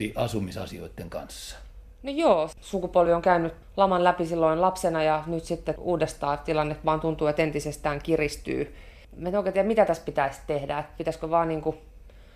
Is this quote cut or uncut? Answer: uncut